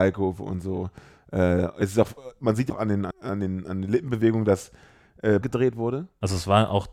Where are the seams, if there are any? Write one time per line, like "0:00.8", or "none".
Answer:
0:02.7
0:03.1
0:05.4